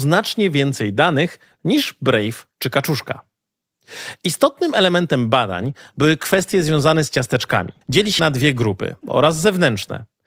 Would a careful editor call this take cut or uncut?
cut